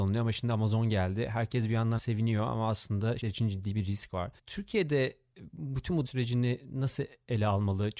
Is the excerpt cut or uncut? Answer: cut